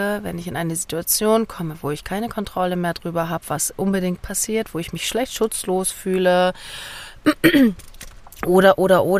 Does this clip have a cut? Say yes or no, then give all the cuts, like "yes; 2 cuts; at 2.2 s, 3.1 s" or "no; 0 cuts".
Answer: no; 0 cuts